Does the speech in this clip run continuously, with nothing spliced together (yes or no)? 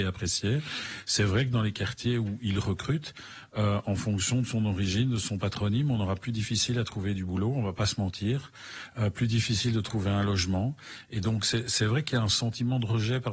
yes